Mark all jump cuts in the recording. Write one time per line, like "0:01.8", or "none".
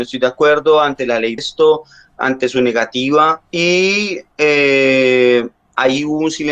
0:01.4
0:03.5